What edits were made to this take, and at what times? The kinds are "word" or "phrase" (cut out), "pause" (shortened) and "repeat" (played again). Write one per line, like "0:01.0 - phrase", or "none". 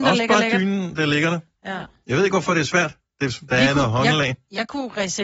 none